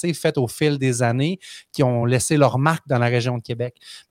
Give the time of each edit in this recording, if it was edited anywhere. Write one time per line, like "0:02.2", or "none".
none